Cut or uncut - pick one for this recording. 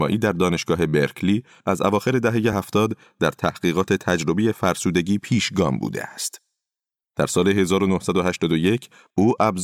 uncut